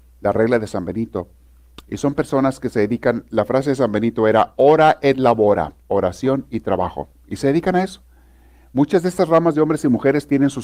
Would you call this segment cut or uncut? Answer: cut